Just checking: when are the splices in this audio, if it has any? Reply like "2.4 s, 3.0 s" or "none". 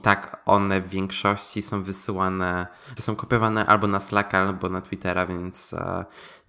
3.0 s

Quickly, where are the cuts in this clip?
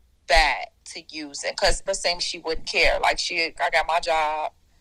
1.9 s, 2.2 s, 3.6 s

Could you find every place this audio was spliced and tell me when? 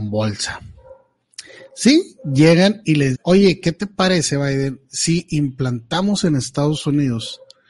3.1 s

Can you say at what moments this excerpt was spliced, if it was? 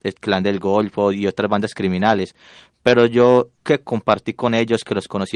3.5 s

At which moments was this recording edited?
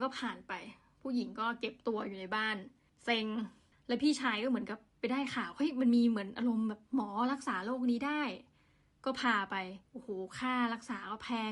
9.9 s

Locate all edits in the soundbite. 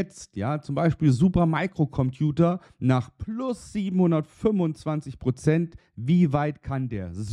none

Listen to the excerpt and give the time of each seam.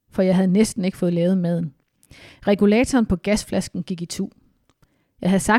none

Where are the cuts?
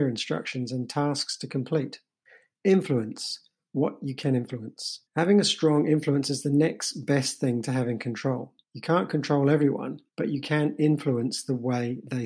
2.3 s, 5.1 s, 8.6 s, 10.1 s

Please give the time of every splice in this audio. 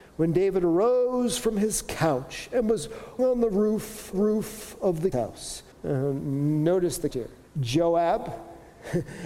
3.2 s, 4.1 s, 5.1 s, 5.7 s, 7.1 s, 7.4 s

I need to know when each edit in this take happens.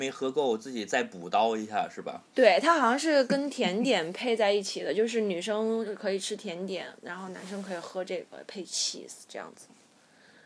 none

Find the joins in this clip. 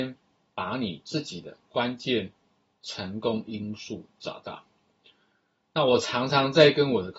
none

